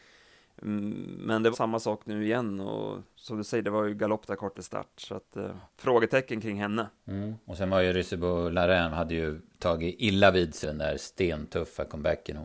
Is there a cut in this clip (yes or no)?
yes